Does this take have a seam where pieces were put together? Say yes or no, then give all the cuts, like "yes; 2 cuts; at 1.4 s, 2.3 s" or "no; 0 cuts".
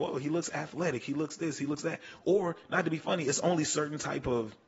no; 0 cuts